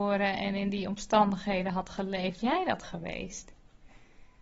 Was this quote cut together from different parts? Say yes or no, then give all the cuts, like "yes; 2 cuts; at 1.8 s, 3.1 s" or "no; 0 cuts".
yes; 1 cut; at 2.4 s